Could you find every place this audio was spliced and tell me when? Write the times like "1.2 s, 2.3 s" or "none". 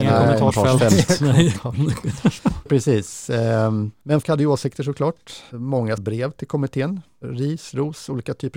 2.7 s, 4.2 s, 6.0 s